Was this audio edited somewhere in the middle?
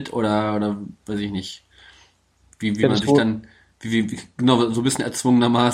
no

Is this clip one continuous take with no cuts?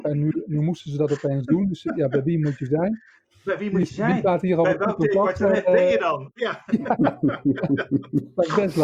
yes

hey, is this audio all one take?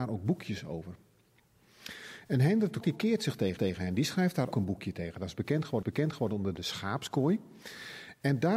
no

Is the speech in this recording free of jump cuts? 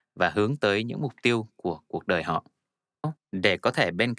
no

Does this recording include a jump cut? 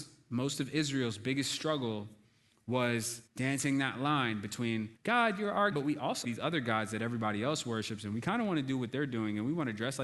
yes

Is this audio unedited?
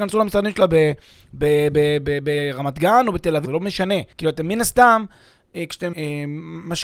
no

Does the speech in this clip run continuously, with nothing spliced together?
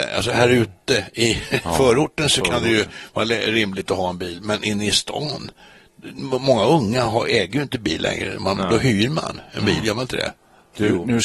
yes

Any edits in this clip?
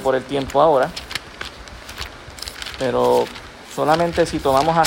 no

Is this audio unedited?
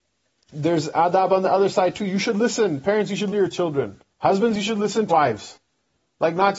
no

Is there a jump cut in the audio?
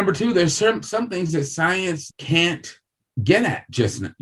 yes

